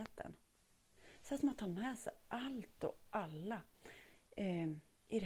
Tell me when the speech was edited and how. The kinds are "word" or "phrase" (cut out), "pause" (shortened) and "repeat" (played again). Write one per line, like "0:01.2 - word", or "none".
none